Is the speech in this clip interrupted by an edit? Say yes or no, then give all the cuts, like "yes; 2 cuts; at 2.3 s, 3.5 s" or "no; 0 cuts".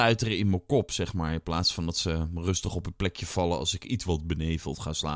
no; 0 cuts